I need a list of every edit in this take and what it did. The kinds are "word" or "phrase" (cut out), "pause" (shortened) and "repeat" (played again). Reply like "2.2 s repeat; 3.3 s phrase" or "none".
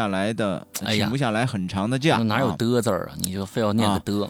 none